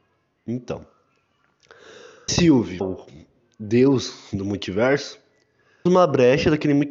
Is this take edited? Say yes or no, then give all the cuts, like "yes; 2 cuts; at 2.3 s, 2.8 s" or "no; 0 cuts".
yes; 3 cuts; at 2.3 s, 2.8 s, 5.9 s